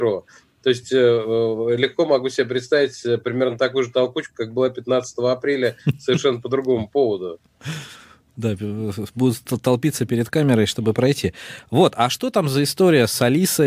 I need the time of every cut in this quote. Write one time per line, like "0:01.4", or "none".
none